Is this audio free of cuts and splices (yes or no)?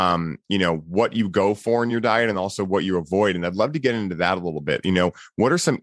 yes